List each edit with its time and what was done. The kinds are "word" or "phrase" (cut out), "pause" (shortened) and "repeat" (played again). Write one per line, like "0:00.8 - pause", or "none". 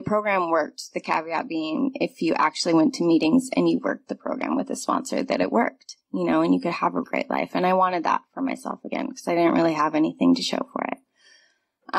0:07.0 - word